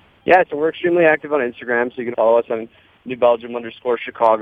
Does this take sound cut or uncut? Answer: cut